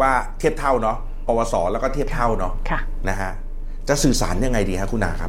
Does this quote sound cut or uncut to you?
cut